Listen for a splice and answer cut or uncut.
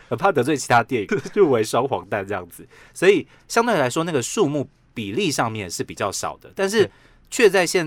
cut